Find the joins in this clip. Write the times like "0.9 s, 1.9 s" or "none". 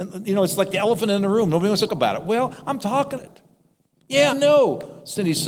1.9 s, 3.2 s, 4.3 s